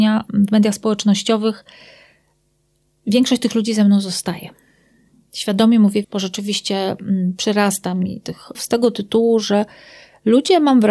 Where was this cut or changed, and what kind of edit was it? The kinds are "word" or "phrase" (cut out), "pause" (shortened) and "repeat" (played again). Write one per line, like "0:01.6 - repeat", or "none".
0:06.0 - word
0:08.5 - word

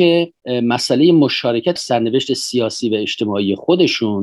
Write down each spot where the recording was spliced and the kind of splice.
0:01.8 - phrase

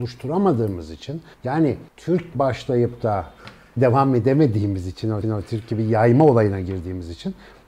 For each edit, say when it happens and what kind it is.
0:01.3 - pause
0:02.3 - word
0:03.8 - phrase
0:05.2 - repeat

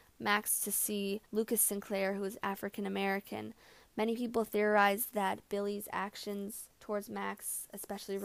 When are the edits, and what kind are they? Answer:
0:01.3 - pause
0:06.7 - pause

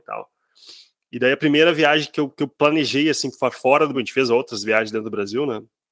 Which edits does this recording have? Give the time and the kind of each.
0:03.9 - word

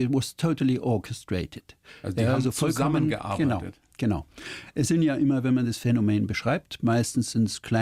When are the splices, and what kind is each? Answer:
none

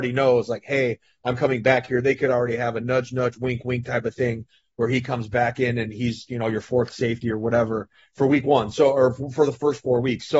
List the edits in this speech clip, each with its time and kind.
none

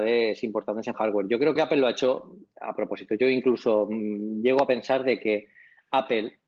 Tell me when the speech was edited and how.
0:00.9 - phrase
0:01.6 - phrase

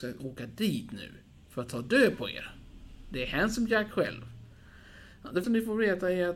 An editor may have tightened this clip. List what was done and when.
0:05.4 - word

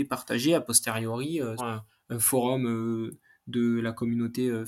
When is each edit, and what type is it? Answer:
0:01.6 - word

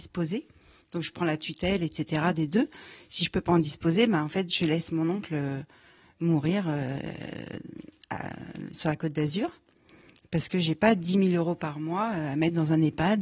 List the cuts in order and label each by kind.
none

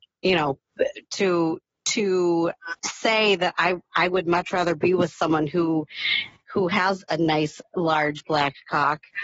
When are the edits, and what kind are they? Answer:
0:02.8 - pause

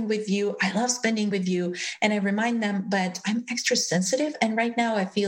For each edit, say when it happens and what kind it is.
0:01.3 - word

